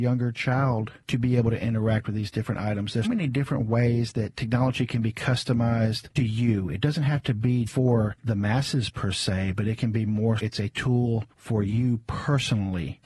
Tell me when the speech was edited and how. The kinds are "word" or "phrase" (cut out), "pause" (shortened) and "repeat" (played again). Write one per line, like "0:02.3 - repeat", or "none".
0:03.0 - word
0:06.2 - word
0:07.7 - word
0:10.4 - word